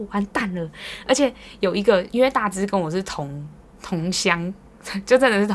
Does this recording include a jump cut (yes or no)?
yes